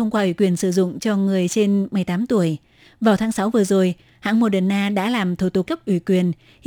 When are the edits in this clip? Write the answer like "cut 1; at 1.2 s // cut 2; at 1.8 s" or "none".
cut 1; at 5.7 s